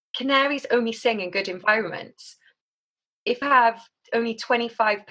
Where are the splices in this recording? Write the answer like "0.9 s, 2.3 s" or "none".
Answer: 3.4 s